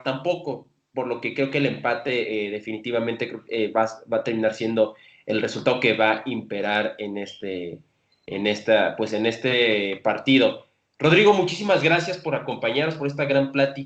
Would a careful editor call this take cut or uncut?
uncut